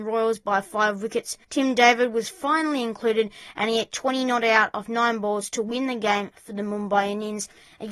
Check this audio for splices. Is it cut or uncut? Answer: cut